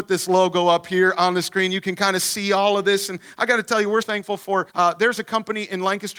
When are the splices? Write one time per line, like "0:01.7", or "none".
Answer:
0:04.0
0:04.7